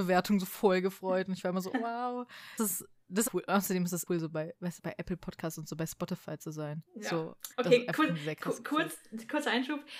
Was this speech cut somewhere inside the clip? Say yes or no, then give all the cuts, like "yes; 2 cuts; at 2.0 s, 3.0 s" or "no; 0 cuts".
yes; 7 cuts; at 1.7 s, 2.6 s, 3.3 s, 4.1 s, 4.8 s, 6.9 s, 7.5 s